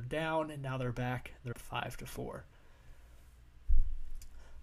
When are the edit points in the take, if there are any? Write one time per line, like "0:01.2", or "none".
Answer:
0:01.5